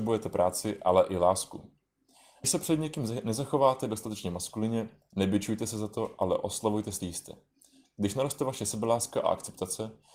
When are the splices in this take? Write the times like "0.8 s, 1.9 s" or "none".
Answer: 2.4 s, 7.0 s

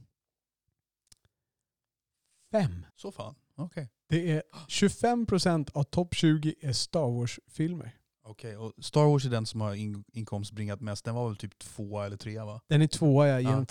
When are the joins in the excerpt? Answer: 2.9 s

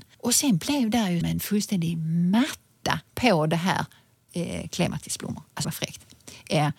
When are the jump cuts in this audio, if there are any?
1.2 s, 3.1 s, 4.3 s, 5.6 s

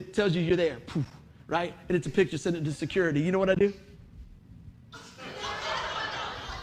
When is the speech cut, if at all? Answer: 2.0 s

